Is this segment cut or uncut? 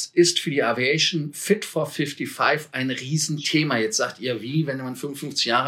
uncut